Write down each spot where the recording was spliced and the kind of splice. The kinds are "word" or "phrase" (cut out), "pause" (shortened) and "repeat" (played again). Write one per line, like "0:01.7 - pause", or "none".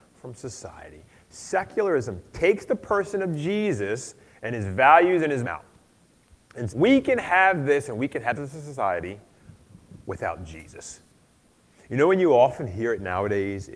0:05.4 - phrase
0:06.7 - word
0:08.3 - word
0:10.0 - pause